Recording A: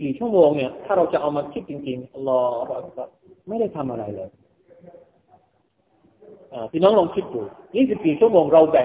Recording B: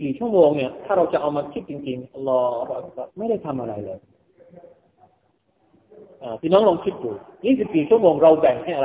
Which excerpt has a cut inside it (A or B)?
B